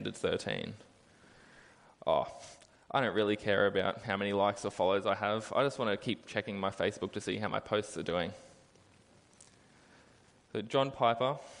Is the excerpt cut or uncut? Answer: uncut